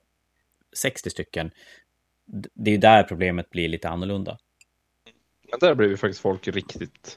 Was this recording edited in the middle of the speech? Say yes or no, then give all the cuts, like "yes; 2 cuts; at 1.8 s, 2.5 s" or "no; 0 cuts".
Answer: no; 0 cuts